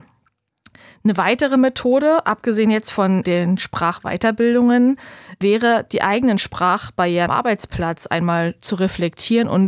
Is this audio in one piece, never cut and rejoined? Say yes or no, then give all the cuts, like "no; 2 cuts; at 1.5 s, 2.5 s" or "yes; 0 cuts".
no; 1 cut; at 7.3 s